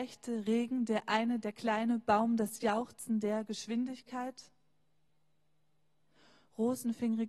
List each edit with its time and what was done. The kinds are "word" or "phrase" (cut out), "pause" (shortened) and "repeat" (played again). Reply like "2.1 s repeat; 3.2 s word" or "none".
none